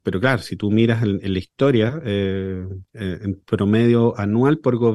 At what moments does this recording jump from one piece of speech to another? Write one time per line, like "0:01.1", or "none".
0:02.9